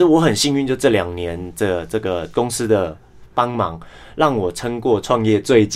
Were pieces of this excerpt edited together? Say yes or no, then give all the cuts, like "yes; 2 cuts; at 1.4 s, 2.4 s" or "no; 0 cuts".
no; 0 cuts